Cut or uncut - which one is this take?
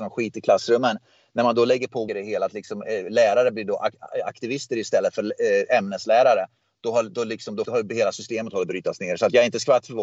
cut